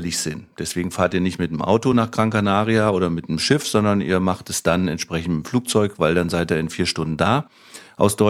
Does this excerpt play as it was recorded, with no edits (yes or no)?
yes